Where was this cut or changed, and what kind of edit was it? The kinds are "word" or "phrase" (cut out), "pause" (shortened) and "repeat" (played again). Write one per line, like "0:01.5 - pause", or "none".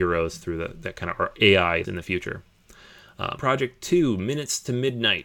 0:01.8 - word
0:03.4 - word

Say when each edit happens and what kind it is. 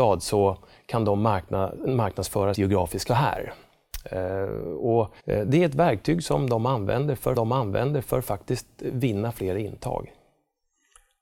0:02.5 - word
0:03.1 - phrase
0:05.2 - pause
0:07.3 - repeat

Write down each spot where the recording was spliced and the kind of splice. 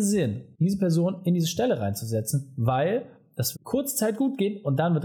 0:03.5 - word

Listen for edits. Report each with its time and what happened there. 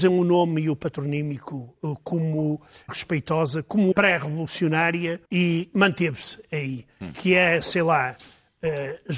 0:02.9 - word
0:03.9 - phrase
0:05.3 - pause

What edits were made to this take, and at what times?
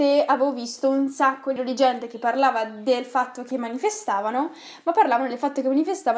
0:01.6 - word

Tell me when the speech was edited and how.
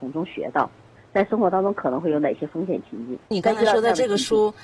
0:03.2 - pause

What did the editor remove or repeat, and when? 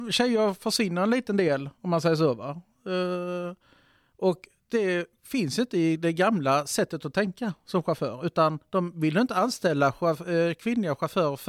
none

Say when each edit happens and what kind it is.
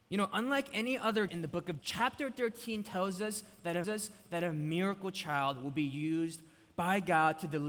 0:01.3 - word
0:01.8 - word
0:03.8 - repeat

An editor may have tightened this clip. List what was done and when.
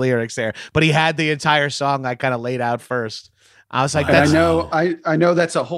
none

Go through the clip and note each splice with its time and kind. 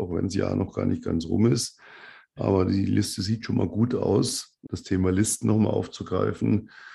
0:04.7 - word

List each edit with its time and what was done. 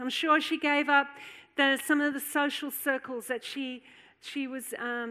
none

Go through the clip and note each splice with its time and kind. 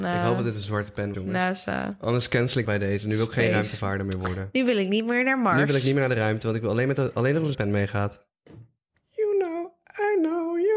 0:01.1 - word
0:02.6 - word
0:07.5 - word

